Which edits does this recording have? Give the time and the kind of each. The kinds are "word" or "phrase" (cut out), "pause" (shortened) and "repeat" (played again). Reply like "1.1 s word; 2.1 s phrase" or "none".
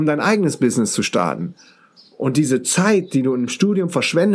none